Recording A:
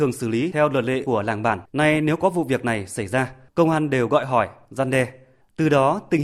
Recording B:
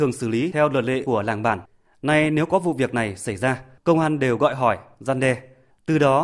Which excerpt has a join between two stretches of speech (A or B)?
A